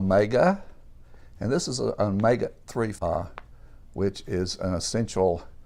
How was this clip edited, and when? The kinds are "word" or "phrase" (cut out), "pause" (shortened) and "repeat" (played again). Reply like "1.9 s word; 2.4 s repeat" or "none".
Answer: 3.0 s phrase